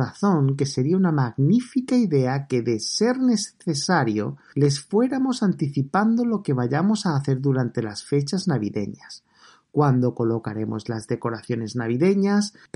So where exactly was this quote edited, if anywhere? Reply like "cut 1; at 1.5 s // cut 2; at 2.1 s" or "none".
none

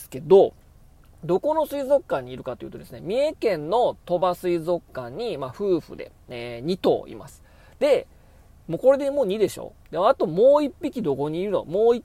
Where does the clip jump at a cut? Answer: none

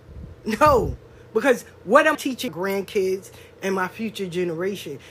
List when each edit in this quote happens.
cut 1; at 2.1 s // cut 2; at 2.5 s

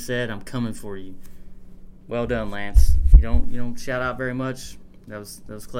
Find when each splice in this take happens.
none

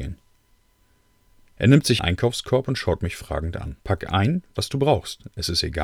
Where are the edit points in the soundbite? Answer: cut 1; at 2.0 s // cut 2; at 3.8 s

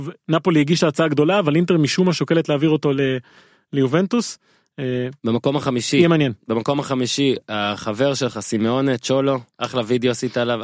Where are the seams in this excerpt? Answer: cut 1; at 5.2 s // cut 2; at 9.5 s

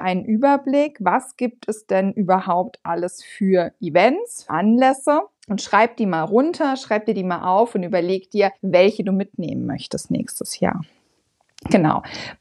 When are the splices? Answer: cut 1; at 4.5 s // cut 2; at 5.3 s // cut 3; at 8.6 s

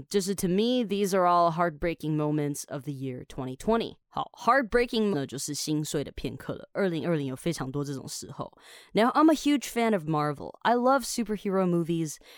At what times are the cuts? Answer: cut 1; at 5.1 s

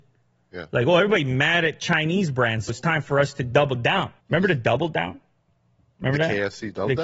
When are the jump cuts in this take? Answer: cut 1; at 2.7 s // cut 2; at 4.2 s

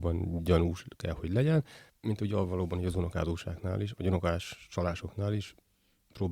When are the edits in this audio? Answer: cut 1; at 1.9 s

